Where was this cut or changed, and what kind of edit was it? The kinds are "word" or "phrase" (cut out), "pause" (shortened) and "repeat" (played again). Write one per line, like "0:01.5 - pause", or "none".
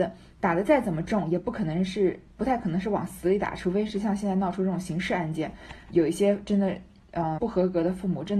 0:07.4 - word